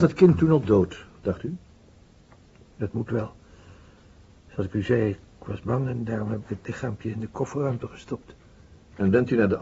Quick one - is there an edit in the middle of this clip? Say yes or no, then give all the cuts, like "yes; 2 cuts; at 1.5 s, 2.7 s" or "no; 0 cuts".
no; 0 cuts